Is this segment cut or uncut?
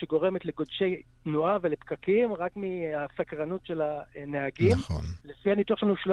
cut